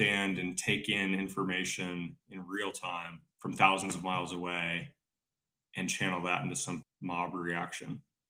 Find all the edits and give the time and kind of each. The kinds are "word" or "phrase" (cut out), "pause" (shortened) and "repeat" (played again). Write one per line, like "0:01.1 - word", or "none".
0:03.3 - pause
0:06.8 - word